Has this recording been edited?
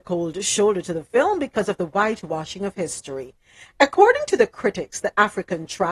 no; 0 cuts

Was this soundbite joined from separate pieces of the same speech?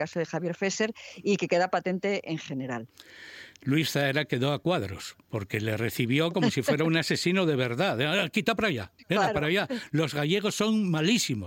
no; 0 cuts

